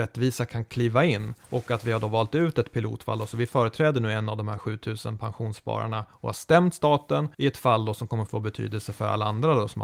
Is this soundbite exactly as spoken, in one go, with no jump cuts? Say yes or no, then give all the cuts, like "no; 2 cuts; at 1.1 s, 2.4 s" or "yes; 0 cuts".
no; 3 cuts; at 1.4 s, 7.3 s, 8.3 s